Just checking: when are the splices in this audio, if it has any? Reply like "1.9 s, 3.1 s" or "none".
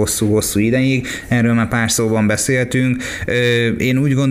none